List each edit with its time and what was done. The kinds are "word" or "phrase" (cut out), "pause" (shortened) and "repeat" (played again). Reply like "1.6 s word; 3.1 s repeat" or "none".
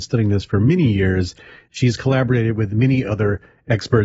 none